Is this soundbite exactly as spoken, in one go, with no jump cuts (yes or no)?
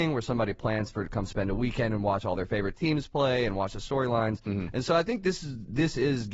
yes